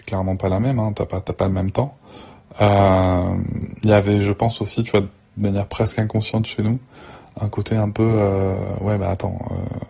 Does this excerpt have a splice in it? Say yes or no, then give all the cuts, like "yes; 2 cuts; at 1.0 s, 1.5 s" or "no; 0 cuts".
no; 0 cuts